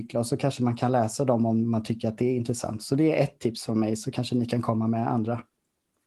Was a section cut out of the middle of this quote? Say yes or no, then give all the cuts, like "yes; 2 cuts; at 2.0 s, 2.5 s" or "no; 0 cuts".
no; 0 cuts